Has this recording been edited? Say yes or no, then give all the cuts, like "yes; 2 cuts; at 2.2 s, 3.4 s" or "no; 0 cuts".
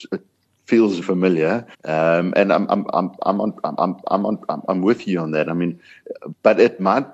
yes; 3 cuts; at 1.0 s, 1.7 s, 3.8 s